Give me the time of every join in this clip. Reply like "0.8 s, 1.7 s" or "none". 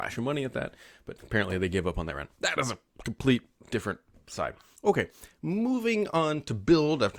1.2 s